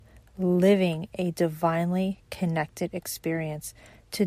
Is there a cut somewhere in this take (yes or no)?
no